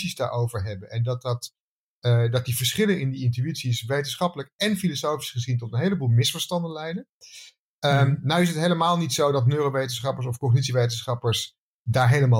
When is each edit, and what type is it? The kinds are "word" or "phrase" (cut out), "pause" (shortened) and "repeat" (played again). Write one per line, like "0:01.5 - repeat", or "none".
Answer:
none